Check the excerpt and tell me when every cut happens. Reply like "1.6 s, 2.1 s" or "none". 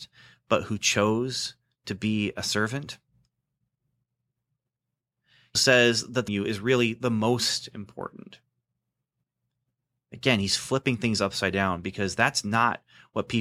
5.6 s, 6.3 s